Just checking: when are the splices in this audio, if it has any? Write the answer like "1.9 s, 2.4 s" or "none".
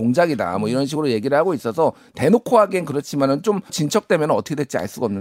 3.7 s